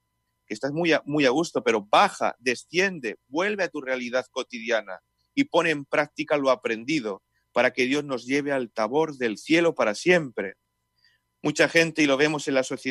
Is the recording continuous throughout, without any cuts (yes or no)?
yes